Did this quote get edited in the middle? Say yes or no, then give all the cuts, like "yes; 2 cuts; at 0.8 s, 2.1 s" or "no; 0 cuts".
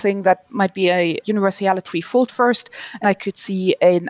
yes; 4 cuts; at 1.2 s, 1.9 s, 2.3 s, 3.0 s